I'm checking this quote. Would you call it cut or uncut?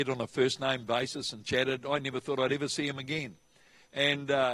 uncut